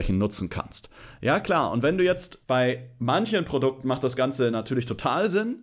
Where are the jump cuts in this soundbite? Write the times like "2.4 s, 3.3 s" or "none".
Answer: 2.4 s

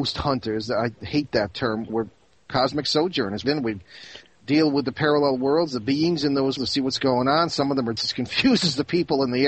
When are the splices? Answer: 1.9 s, 3.4 s, 6.6 s, 8.0 s

